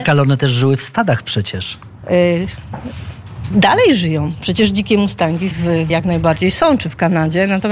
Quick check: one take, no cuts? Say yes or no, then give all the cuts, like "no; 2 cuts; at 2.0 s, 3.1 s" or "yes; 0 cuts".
no; 2 cuts; at 5.5 s, 5.9 s